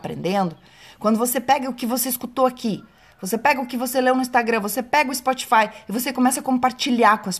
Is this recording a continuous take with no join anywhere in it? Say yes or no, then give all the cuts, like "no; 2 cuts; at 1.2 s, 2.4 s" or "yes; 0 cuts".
yes; 0 cuts